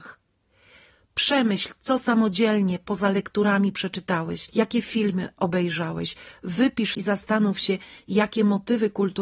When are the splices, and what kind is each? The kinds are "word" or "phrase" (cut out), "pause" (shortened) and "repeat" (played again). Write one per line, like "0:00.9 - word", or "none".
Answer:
0:06.9 - phrase

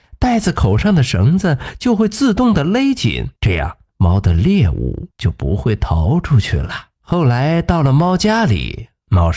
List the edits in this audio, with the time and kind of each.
0:03.4 - pause
0:03.9 - pause
0:05.1 - pause
0:07.0 - pause

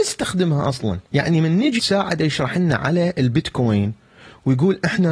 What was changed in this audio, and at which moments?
0:01.1 - pause
0:01.8 - word

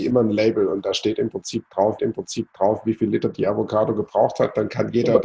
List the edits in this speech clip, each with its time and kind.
0:02.0 - repeat

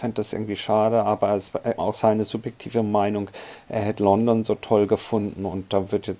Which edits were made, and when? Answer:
0:01.8 - word

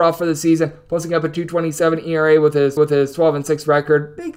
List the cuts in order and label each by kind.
0:02.8 - repeat

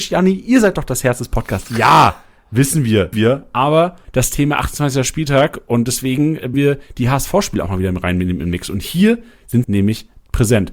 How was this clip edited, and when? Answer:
0:03.1 - word
0:04.0 - word
0:06.5 - word
0:09.6 - word

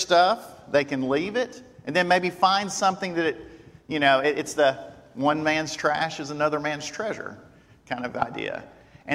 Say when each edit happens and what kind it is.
none

